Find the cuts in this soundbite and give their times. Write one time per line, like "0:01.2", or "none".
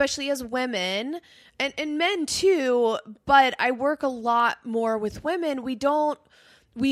none

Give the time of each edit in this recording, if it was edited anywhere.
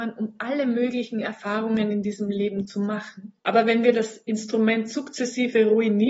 0:03.4

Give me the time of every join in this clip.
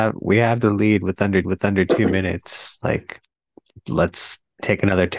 0:01.4

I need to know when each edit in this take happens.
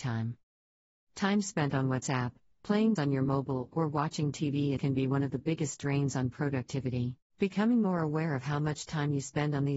0:03.0
0:04.8
0:07.3

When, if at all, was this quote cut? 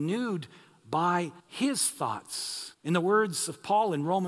0:01.4
0:02.7

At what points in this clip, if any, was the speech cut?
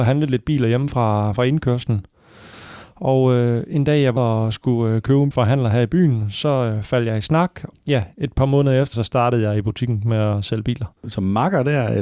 0:04.2
0:05.3
0:08.9
0:11.0

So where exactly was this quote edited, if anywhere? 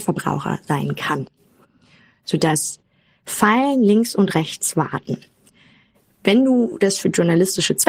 none

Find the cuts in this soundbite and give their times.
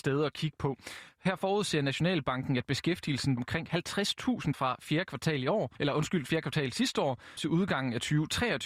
0:03.4
0:04.5
0:05.8
0:07.4

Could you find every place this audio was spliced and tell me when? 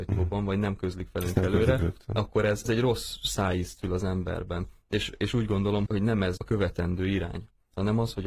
0:05.9
0:06.4

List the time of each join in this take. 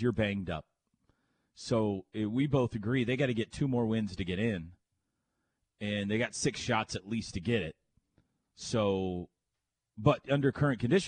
none

